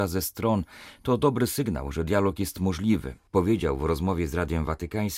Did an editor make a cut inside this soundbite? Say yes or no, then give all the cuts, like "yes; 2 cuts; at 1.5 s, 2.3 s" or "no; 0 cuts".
no; 0 cuts